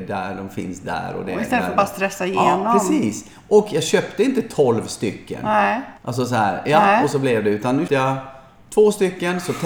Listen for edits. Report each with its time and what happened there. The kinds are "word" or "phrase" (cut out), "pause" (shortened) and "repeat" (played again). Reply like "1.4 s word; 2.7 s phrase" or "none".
6.0 s pause; 7.9 s word